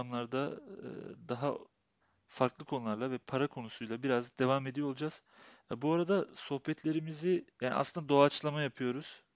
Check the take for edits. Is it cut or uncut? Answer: cut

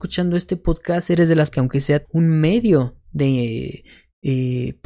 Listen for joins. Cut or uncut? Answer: cut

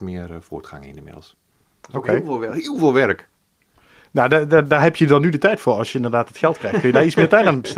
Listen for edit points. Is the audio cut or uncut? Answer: uncut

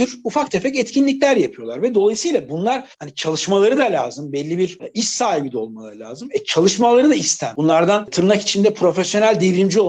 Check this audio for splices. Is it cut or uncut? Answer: cut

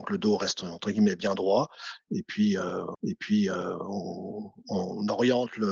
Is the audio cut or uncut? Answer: cut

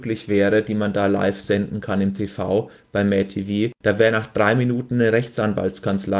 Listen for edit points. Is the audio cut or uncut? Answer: uncut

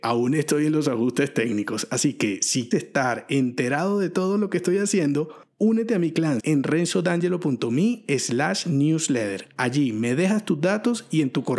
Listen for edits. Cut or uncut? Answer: cut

